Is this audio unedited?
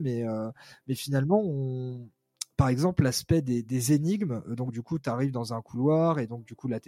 yes; 0 cuts

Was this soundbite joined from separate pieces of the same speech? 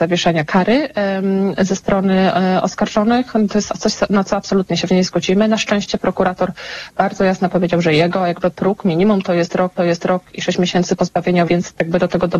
yes; 3 cuts; at 4.9 s, 9.8 s, 11.5 s

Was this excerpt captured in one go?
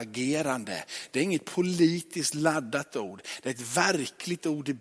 yes; 0 cuts

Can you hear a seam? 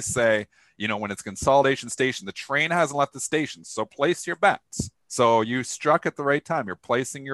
yes; 1 cut; at 5.0 s

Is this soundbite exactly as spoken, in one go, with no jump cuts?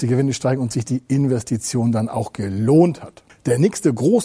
yes; 0 cuts

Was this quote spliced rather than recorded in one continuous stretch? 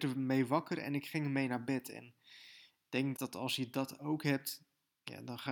yes; 1 cut; at 3.2 s

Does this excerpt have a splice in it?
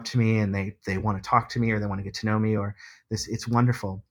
no; 0 cuts

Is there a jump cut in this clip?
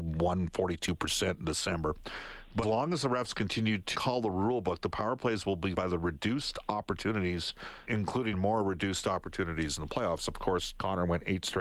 yes; 5 cuts; at 2.6 s, 3.9 s, 5.7 s, 7.9 s, 8.3 s

